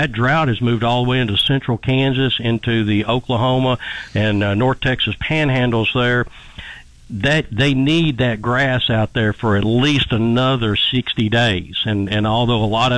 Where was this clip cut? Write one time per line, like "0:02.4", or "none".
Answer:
none